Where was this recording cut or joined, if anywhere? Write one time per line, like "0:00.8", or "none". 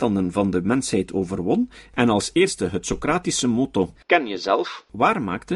0:04.0